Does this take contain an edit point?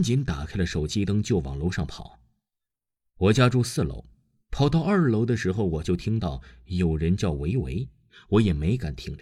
no; 0 cuts

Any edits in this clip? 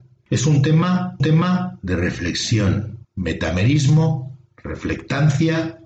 yes; 2 cuts; at 1.2 s, 3.0 s

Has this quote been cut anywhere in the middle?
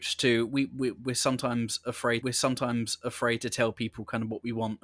yes; 1 cut; at 2.2 s

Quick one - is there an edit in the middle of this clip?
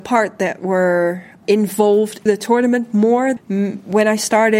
yes; 3 cuts; at 1.4 s, 2.3 s, 3.4 s

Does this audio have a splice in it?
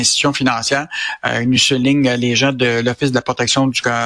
no; 0 cuts

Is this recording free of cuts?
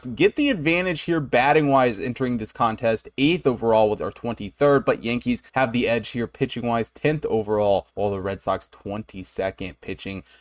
no; 3 cuts; at 4.0 s, 5.5 s, 7.9 s

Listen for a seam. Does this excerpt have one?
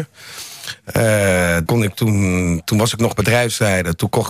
yes; 1 cut; at 1.7 s

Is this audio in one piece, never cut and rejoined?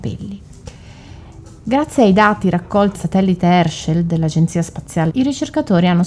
no; 2 cuts; at 2.9 s, 5.1 s

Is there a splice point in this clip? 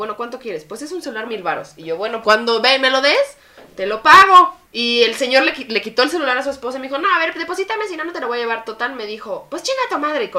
yes; 4 cuts; at 1.3 s, 2.2 s, 4.6 s, 7.0 s

